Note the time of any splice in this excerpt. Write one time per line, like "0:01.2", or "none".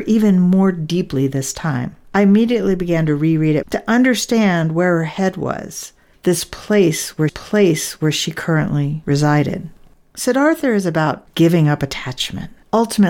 0:02.0
0:03.6
0:07.3